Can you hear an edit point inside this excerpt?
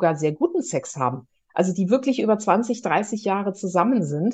no; 0 cuts

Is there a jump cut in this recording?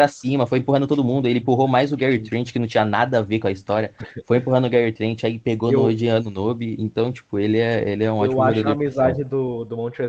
no; 0 cuts

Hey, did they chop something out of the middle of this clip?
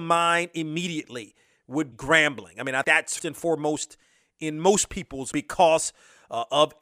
yes; 4 cuts; at 1.9 s, 2.8 s, 3.2 s, 5.3 s

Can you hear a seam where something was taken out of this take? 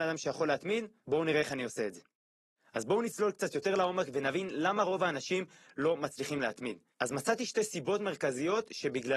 no; 0 cuts

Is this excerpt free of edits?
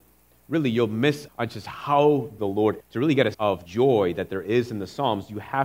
no; 5 cuts; at 1.3 s, 2.4 s, 2.8 s, 3.3 s, 3.7 s

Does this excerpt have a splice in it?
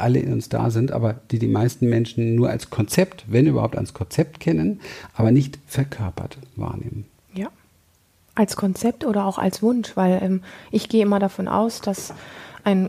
no; 0 cuts

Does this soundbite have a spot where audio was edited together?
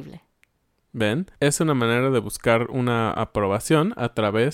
yes; 1 cut; at 1.4 s

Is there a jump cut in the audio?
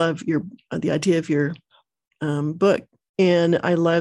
no; 0 cuts

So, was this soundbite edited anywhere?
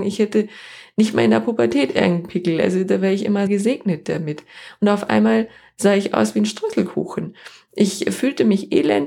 yes; 1 cut; at 3.5 s

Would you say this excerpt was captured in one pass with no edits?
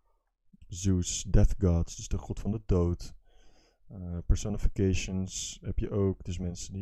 yes; 0 cuts

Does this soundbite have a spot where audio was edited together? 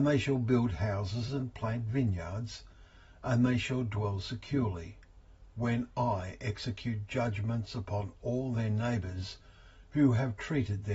no; 0 cuts

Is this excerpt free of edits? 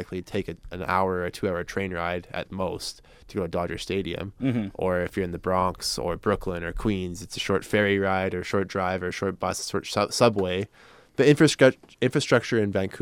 yes; 0 cuts

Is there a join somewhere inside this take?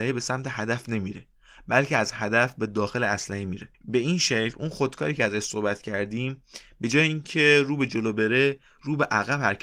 yes; 1 cut; at 3.7 s

